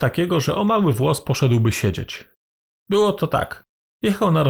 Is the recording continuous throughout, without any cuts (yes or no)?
yes